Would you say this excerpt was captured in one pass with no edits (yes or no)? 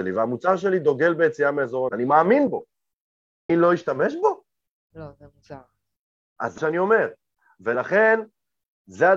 no